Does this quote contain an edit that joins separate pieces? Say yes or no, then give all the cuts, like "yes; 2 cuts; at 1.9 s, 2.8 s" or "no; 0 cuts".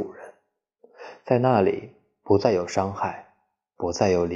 no; 0 cuts